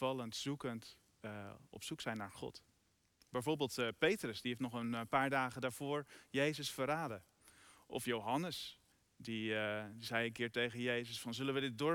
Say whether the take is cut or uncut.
cut